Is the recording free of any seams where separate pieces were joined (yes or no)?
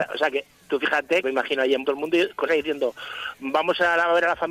no